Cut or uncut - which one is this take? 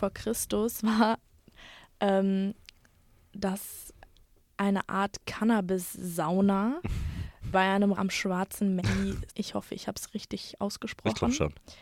cut